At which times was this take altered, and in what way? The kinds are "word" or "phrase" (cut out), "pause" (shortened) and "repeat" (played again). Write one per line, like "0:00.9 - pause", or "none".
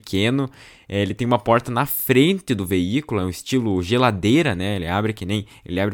none